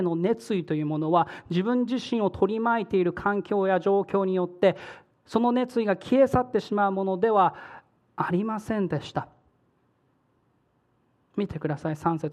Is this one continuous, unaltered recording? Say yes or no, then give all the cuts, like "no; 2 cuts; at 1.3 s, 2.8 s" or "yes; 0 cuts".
yes; 0 cuts